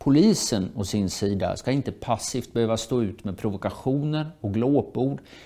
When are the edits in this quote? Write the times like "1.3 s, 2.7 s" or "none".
none

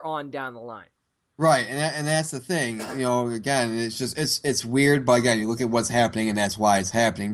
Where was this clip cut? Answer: none

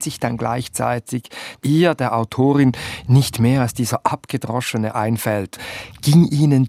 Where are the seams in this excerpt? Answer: 1.6 s, 4.9 s

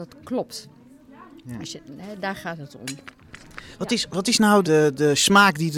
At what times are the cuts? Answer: 4.6 s

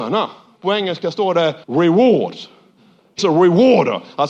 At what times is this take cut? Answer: 1.6 s, 3.2 s

